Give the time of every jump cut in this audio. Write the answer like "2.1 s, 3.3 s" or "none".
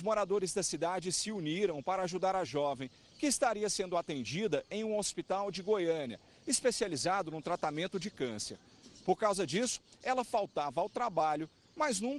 none